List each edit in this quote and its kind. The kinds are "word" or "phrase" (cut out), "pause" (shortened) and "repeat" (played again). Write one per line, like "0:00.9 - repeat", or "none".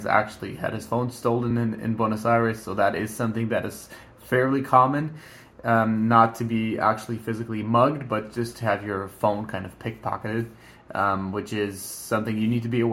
none